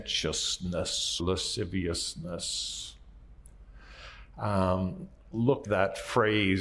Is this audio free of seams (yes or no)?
no